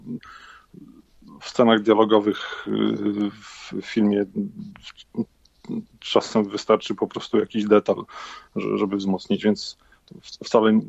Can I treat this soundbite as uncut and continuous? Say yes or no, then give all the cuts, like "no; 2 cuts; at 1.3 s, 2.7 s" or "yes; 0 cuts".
yes; 0 cuts